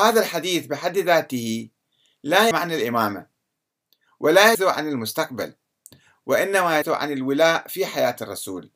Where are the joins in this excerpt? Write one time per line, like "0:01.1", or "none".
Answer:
0:02.5
0:04.5
0:06.8

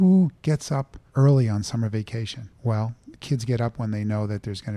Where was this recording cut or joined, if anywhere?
0:02.5

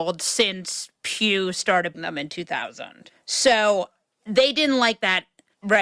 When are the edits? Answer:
0:01.9

